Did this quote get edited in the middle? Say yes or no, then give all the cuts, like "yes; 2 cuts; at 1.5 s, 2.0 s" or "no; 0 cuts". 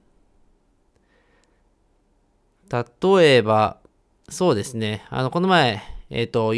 no; 0 cuts